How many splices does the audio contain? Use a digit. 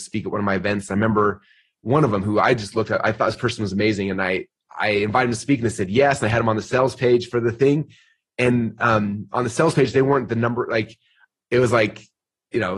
0